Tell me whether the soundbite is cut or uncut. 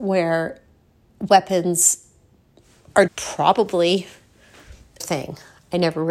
cut